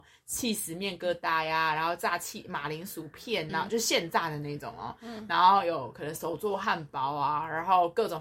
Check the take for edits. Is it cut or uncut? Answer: cut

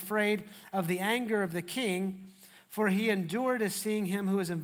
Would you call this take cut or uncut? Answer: uncut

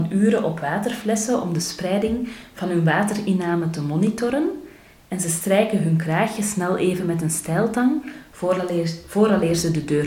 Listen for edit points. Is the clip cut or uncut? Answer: uncut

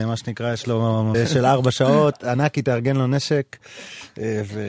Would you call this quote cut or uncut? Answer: cut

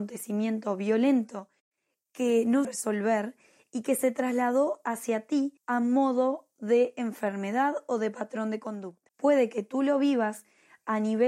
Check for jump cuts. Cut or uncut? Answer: cut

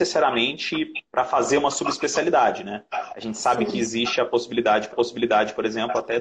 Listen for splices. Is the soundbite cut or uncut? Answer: cut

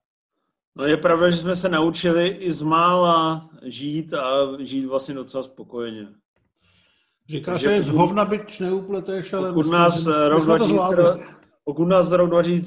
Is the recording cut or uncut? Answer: uncut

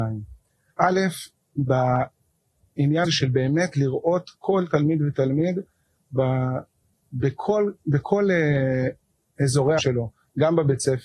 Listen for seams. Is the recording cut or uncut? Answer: cut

